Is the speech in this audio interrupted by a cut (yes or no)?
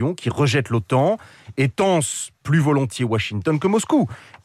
no